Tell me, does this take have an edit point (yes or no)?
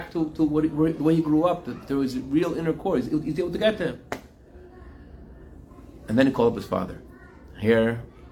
no